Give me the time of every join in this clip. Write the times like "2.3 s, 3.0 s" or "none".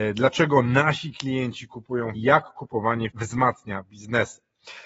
2.1 s, 3.1 s